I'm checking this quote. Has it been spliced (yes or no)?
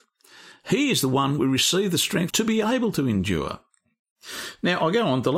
yes